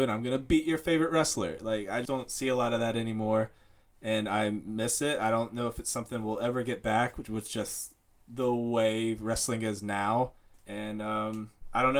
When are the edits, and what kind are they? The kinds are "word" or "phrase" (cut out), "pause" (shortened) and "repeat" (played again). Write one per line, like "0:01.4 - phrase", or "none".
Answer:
0:02.1 - word